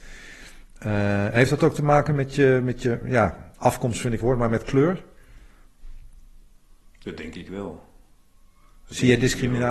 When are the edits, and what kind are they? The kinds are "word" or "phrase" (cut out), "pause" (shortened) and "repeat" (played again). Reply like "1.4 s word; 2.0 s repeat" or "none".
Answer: 4.2 s word